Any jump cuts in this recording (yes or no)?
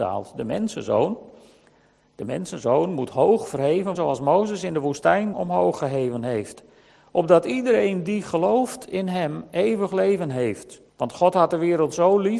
yes